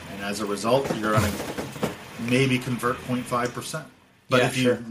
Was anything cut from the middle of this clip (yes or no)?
no